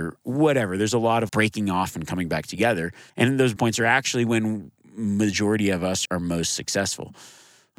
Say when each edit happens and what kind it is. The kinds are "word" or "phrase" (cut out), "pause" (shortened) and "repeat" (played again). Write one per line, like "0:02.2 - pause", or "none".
0:01.3 - word
0:03.1 - pause
0:03.6 - phrase
0:06.1 - word